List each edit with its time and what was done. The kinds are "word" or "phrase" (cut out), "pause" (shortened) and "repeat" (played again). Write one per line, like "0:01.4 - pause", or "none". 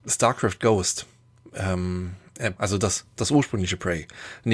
0:02.6 - word